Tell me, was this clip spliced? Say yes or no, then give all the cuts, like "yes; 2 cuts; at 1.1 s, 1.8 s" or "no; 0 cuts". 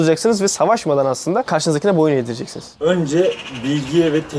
no; 0 cuts